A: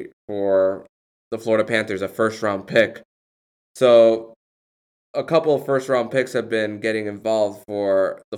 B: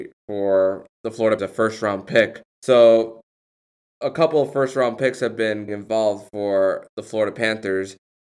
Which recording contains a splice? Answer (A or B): B